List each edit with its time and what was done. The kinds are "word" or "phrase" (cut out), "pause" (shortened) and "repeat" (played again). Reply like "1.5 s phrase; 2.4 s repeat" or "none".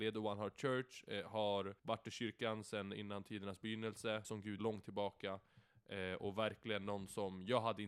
1.8 s pause; 4.2 s phrase; 4.6 s phrase